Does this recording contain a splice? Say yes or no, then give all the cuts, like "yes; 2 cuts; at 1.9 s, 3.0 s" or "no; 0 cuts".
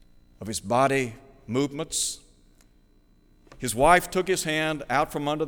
no; 0 cuts